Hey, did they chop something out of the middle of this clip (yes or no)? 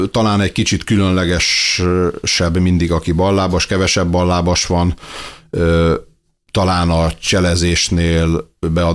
no